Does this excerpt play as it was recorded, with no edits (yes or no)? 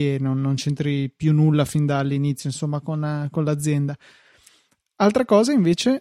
yes